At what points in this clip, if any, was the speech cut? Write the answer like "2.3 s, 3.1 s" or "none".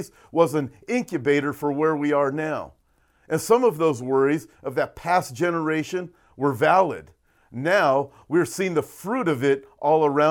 none